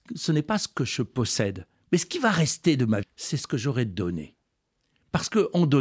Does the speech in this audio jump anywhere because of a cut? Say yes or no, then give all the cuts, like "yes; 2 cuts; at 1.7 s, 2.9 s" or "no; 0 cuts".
yes; 1 cut; at 3.0 s